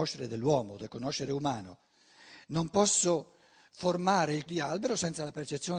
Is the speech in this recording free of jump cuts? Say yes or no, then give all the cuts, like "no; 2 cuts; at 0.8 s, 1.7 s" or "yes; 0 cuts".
no; 1 cut; at 4.5 s